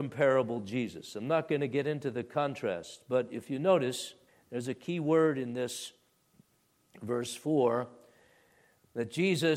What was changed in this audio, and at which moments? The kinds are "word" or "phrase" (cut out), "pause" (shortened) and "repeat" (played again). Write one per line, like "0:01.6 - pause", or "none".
0:04.3 - pause

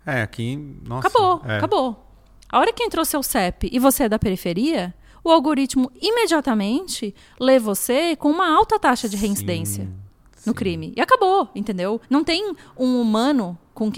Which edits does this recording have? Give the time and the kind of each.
0:12.0 - pause

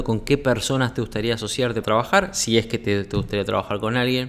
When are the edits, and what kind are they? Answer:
0:01.8 - word

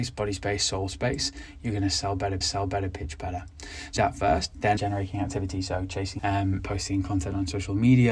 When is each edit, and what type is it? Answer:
0:02.4 - repeat
0:04.0 - word
0:04.8 - phrase
0:06.2 - word
0:06.6 - word

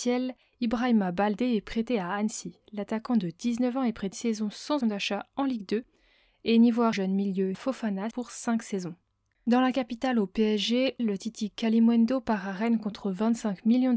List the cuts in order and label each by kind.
0:04.1 - word
0:04.8 - word
0:06.9 - word
0:07.5 - word
0:08.1 - word
0:11.0 - word

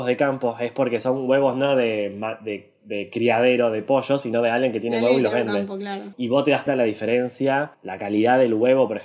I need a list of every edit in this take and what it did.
0:06.7 - word
0:07.7 - pause

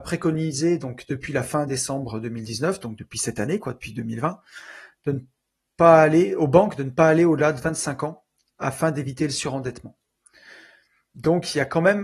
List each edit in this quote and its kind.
none

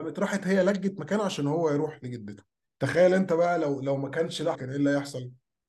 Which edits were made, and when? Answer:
0:02.6 - pause
0:04.5 - word

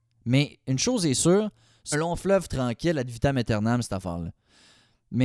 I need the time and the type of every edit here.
0:01.9 - phrase

